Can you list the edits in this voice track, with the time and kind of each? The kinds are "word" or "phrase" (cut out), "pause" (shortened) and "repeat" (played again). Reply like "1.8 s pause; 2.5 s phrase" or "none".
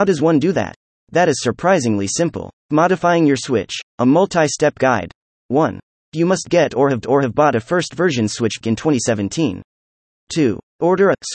3.9 s pause; 7.0 s repeat; 8.6 s word

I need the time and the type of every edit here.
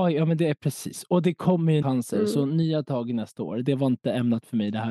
1.8 s word

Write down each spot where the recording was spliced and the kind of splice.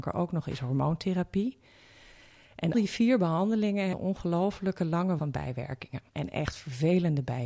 2.7 s word; 3.9 s word; 5.2 s word; 6.1 s pause

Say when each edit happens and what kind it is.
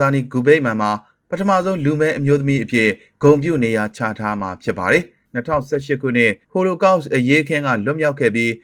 6.4 s pause

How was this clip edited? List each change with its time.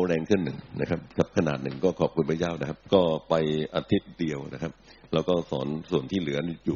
none

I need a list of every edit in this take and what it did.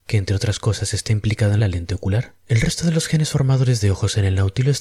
1.6 s phrase; 2.4 s pause

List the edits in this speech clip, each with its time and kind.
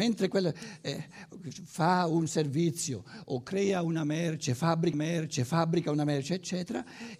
3.2 s word; 4.9 s repeat

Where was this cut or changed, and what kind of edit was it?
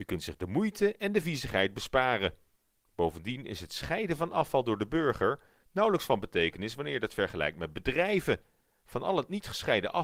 none

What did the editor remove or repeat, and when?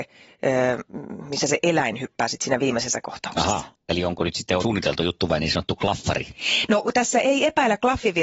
4.6 s word

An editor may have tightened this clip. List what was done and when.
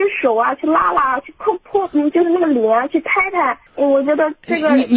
3.7 s pause

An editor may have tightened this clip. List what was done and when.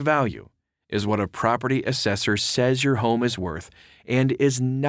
none

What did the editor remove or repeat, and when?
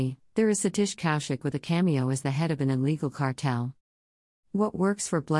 none

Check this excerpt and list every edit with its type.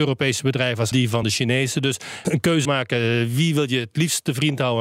0.9 s phrase; 1.2 s phrase; 2.2 s phrase; 2.6 s word

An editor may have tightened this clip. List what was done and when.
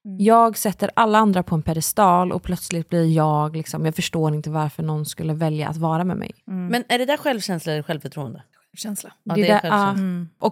none

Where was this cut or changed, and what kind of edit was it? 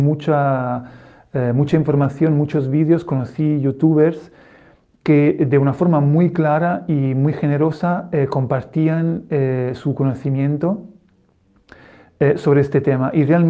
none

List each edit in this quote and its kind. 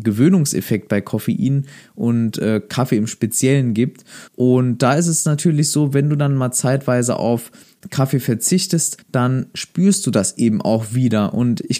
4.3 s pause; 9.0 s pause

